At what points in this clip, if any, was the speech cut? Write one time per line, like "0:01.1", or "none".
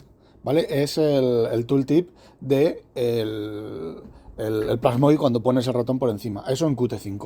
none